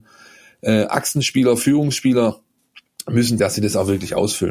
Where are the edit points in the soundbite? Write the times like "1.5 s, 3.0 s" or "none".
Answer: 3.4 s